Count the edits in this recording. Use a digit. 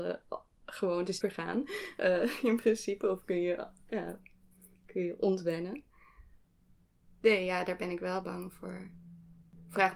2